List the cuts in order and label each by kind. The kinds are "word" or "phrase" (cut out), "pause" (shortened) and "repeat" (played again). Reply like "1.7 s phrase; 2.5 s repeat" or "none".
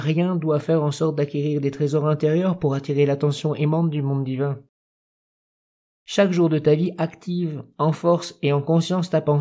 none